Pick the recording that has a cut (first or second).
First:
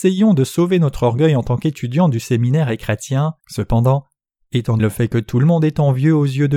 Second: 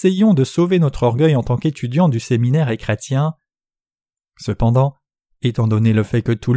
first